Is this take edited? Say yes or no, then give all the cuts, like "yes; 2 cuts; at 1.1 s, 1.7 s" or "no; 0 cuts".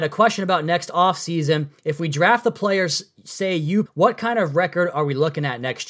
yes; 1 cut; at 3.9 s